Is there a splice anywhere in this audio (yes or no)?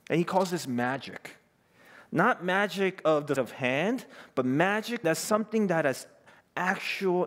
yes